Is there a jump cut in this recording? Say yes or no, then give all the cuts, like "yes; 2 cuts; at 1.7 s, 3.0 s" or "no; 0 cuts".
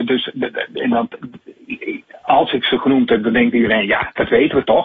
no; 0 cuts